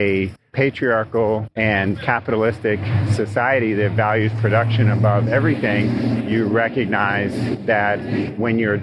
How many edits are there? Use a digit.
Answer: 1